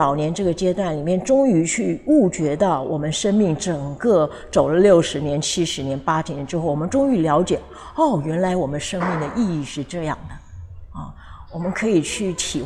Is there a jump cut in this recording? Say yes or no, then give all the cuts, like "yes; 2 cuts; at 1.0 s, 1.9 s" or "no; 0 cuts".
no; 0 cuts